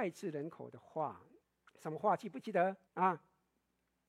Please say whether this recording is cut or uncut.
cut